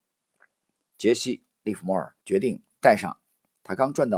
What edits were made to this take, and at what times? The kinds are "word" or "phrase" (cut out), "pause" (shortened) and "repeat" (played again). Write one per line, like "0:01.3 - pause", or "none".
0:02.2 - pause